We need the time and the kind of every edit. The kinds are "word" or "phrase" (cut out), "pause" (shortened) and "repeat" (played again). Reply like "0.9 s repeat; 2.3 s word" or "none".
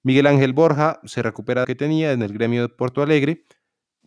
1.6 s phrase